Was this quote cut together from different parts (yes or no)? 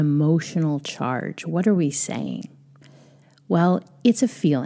no